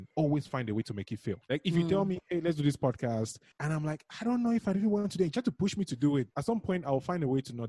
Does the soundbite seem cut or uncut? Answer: cut